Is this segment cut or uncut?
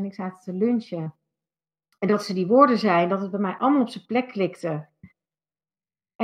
uncut